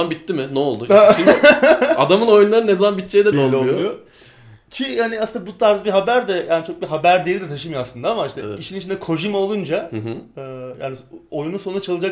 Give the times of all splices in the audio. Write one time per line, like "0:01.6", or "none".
0:03.3